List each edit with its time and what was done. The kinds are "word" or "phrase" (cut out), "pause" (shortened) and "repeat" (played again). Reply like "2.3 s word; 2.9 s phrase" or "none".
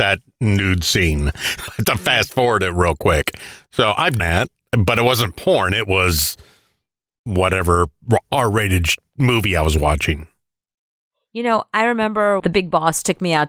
1.7 s word; 4.2 s word; 12.4 s word